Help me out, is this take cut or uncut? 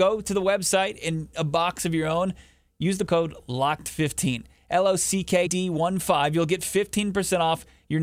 cut